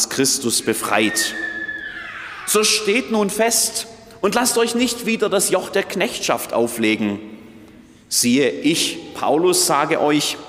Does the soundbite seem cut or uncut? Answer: uncut